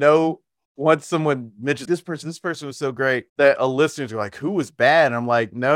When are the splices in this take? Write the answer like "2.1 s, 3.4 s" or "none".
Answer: 1.9 s, 2.2 s, 3.3 s